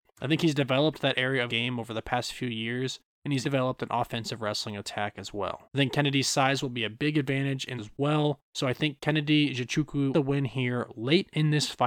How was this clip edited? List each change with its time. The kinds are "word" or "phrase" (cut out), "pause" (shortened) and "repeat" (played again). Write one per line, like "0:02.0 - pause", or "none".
0:01.5 - word
0:03.4 - word
0:05.6 - pause
0:07.8 - phrase
0:08.5 - pause
0:10.1 - phrase